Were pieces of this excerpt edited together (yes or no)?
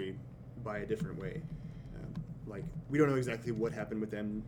no